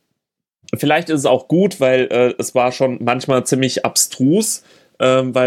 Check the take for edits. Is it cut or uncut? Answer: uncut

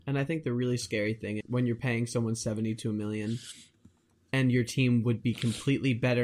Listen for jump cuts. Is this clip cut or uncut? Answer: cut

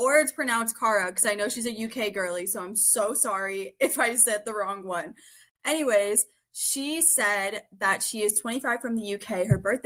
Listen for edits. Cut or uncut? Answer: uncut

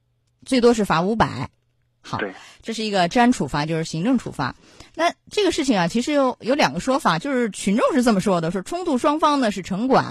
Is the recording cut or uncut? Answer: uncut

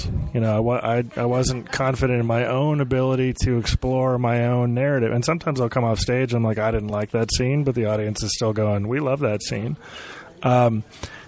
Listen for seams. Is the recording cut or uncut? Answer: uncut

